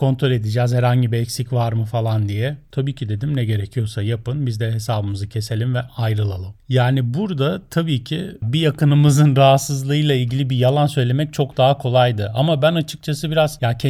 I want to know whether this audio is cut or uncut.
uncut